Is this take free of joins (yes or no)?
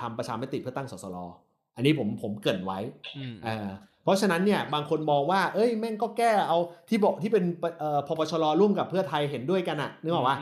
yes